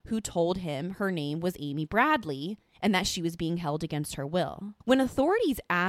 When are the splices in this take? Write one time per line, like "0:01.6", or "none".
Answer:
0:04.8